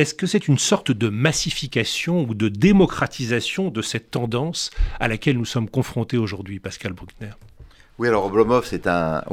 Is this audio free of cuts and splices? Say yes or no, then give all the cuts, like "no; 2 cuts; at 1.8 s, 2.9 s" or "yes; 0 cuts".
yes; 0 cuts